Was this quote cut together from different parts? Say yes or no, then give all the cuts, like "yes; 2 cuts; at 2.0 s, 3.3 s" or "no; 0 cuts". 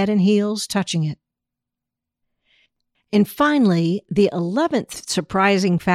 no; 0 cuts